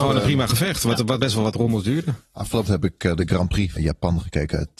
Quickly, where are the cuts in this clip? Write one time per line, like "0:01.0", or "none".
0:01.2
0:02.7
0:03.8